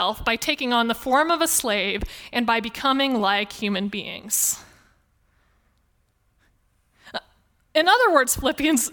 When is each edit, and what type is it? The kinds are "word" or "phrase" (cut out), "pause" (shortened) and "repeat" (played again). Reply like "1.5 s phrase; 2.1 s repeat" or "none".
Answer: none

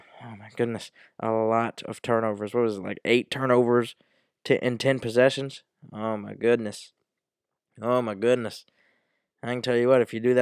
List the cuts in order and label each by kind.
none

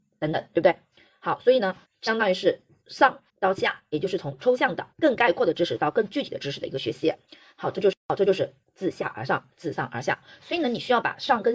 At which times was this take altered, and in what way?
1.8 s pause; 3.3 s pause; 4.9 s pause; 8.0 s pause

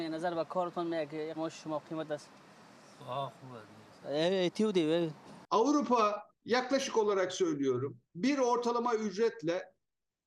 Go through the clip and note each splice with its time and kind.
1.4 s word; 6.4 s pause; 8.0 s pause

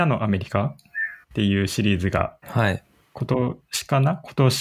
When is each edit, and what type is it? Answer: 1.2 s pause; 2.4 s pause

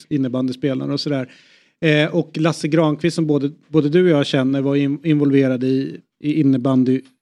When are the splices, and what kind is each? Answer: none

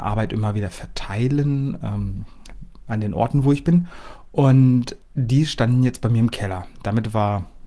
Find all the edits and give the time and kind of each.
5.0 s pause

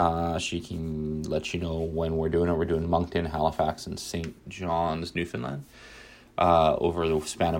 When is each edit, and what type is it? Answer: none

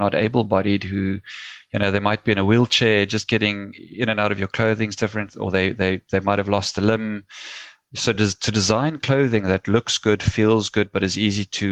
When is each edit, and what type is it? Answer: none

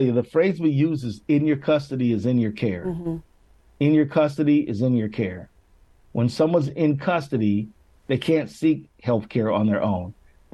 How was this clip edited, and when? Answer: none

